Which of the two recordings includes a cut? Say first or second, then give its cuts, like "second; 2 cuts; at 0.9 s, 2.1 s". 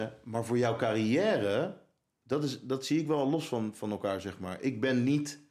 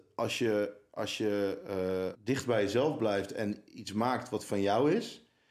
second; 1 cut; at 2.1 s